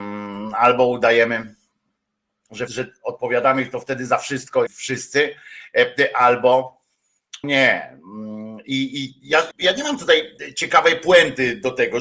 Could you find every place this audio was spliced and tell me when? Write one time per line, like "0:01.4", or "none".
0:02.7
0:04.7
0:07.4
0:09.5